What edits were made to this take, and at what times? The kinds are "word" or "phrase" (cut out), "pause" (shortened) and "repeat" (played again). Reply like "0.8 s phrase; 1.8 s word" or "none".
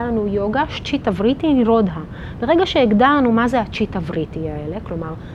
none